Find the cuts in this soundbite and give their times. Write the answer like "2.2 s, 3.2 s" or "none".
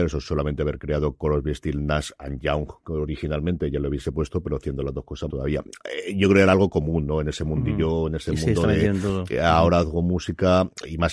5.3 s